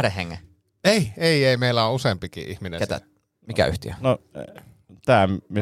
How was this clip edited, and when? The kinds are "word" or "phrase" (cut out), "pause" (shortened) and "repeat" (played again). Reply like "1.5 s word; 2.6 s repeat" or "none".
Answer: none